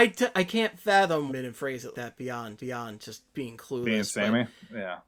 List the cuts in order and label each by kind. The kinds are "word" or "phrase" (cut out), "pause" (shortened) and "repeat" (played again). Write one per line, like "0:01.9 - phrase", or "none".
0:01.3 - phrase
0:01.9 - word
0:02.6 - repeat